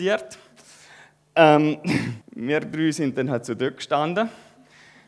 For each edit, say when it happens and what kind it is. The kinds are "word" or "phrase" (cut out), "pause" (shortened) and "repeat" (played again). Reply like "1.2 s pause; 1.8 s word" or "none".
2.2 s pause